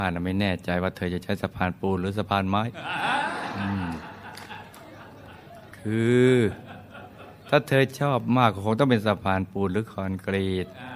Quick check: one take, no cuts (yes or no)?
yes